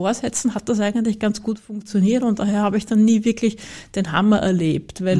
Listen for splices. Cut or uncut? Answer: uncut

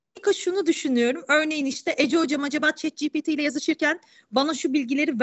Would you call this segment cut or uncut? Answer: uncut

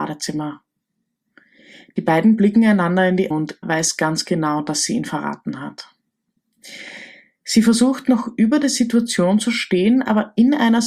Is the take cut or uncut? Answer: cut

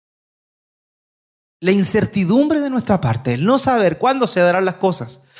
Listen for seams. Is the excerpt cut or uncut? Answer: uncut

